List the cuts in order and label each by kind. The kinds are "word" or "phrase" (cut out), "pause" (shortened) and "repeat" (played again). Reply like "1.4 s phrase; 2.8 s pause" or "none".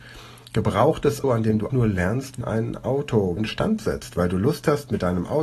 1.2 s word; 1.7 s word; 2.4 s word; 3.4 s word